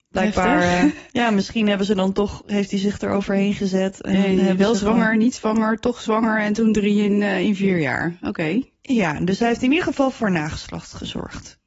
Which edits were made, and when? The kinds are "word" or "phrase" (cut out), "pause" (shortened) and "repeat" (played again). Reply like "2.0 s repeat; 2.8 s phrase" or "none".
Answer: none